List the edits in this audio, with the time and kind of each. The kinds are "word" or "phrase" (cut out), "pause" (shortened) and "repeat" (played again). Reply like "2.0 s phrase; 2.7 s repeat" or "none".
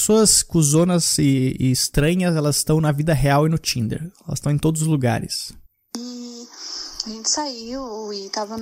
5.7 s pause